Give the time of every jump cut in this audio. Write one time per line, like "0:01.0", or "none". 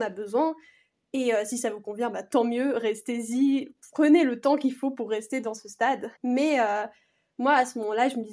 0:06.2